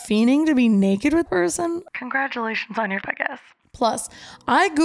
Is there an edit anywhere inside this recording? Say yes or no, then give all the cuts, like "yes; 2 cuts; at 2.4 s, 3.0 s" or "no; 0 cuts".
yes; 3 cuts; at 1.3 s, 1.9 s, 3.0 s